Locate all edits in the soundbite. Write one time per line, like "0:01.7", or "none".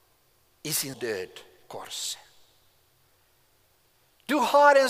0:00.9
0:01.6